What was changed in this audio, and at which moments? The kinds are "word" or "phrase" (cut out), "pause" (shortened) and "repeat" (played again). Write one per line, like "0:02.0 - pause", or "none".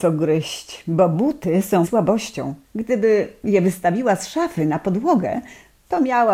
0:01.8 - phrase
0:02.6 - pause